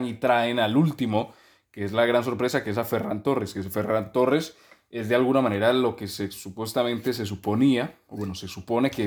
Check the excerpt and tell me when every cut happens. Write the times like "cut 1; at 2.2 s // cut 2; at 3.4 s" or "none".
none